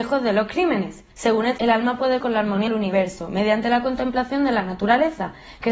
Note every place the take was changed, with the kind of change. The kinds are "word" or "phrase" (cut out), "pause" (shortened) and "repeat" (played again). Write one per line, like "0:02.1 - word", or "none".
0:01.1 - pause
0:01.6 - word
0:02.2 - word
0:02.7 - word